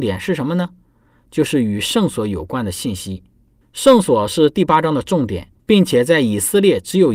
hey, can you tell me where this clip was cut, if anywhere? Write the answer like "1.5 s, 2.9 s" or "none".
3.6 s, 5.6 s